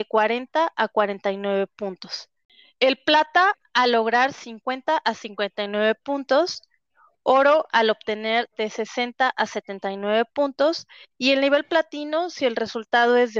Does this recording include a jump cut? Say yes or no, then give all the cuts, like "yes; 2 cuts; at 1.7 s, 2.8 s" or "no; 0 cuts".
no; 0 cuts